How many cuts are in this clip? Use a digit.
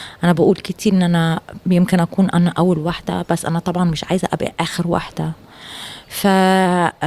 0